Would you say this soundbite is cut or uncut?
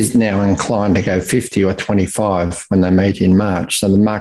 uncut